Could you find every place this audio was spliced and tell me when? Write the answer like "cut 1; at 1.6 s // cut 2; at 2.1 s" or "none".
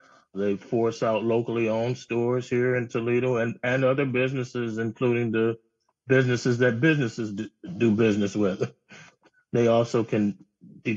none

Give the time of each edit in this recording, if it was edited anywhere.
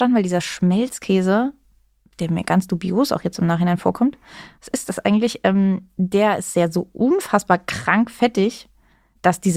none

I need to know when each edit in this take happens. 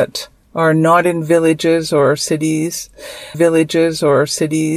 cut 1; at 3.3 s

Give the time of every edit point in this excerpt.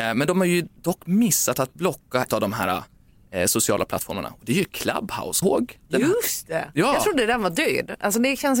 cut 1; at 2.3 s // cut 2; at 5.4 s

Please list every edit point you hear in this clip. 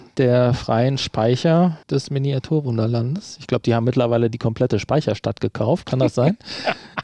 cut 1; at 1.8 s

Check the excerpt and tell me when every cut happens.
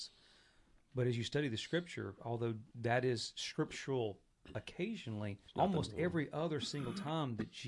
cut 1; at 2.7 s // cut 2; at 5.5 s

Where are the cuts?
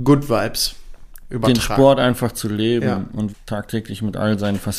cut 1; at 3.3 s

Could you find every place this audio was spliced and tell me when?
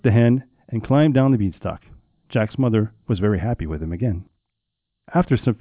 none

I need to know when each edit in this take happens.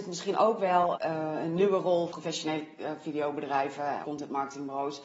cut 1; at 0.9 s // cut 2; at 2.1 s // cut 3; at 4.0 s

